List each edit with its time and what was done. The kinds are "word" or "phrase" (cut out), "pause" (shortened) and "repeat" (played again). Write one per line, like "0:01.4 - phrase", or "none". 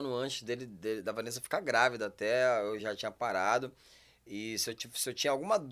none